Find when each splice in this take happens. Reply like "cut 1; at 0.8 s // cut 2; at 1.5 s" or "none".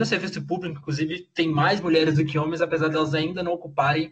none